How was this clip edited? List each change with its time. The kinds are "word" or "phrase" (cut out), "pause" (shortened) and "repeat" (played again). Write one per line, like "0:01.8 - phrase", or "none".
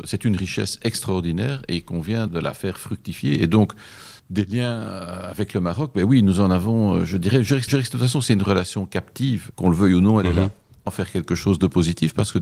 0:02.3 - word
0:04.2 - pause
0:07.7 - repeat
0:09.5 - word
0:10.9 - phrase